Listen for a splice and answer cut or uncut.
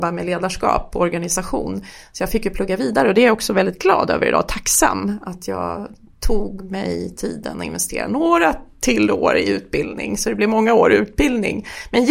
uncut